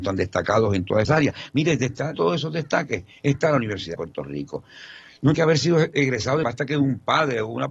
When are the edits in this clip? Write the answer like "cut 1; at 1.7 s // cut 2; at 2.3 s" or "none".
cut 1; at 1.0 s // cut 2; at 2.1 s // cut 3; at 3.2 s // cut 4; at 3.9 s // cut 5; at 5.3 s // cut 6; at 6.4 s